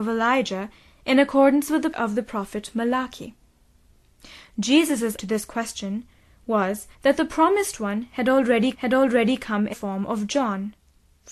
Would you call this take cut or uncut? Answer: cut